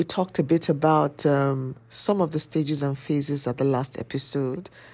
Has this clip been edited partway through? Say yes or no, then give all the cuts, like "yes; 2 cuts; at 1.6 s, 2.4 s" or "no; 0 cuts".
no; 0 cuts